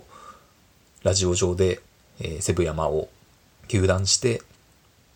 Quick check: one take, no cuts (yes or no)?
yes